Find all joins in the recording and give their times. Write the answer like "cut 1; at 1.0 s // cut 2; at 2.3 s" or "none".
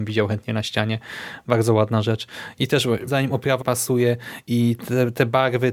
cut 1; at 3.1 s // cut 2; at 3.6 s